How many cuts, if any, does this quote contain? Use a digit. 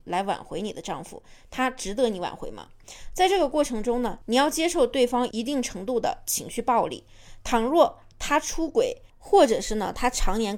1